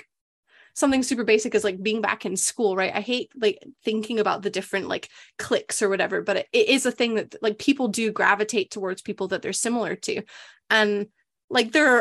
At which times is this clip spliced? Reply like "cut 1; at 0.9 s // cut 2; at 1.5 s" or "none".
none